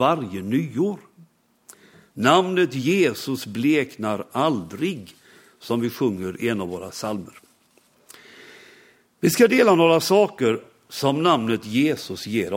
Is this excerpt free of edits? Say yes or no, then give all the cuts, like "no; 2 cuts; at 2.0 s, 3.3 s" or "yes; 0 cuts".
yes; 0 cuts